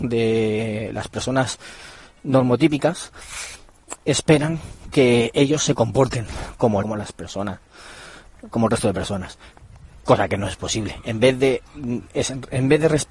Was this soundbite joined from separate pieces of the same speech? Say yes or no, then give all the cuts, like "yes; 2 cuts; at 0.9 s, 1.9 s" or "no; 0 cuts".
yes; 3 cuts; at 4.0 s, 6.8 s, 11.7 s